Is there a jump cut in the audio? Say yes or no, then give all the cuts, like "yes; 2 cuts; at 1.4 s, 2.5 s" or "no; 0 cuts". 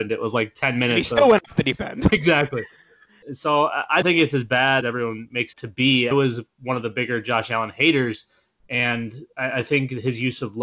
yes; 6 cuts; at 2.1 s, 3.2 s, 4.0 s, 4.8 s, 5.5 s, 6.1 s